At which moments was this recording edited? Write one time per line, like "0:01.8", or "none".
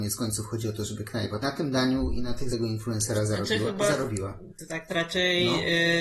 0:01.4
0:02.5
0:04.9